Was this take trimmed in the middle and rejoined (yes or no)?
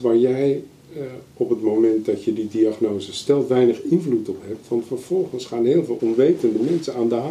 yes